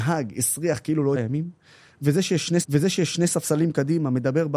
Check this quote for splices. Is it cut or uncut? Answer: cut